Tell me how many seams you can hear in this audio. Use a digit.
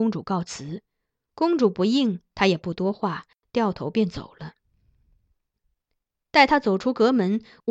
0